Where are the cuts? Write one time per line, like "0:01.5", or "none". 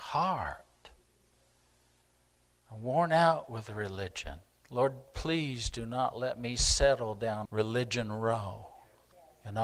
0:07.5